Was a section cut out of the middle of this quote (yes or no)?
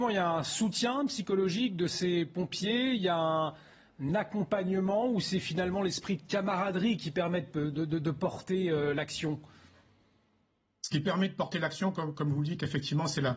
no